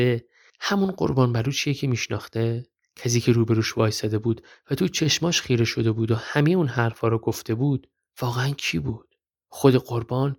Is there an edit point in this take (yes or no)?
no